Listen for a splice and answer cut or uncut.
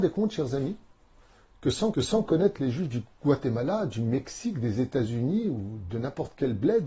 cut